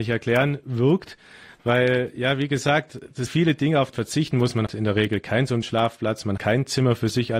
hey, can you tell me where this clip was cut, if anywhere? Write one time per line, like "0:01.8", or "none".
0:03.3
0:03.9
0:04.7
0:05.6
0:06.4